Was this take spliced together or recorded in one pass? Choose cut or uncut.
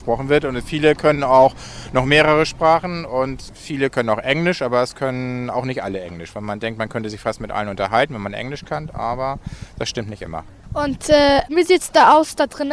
uncut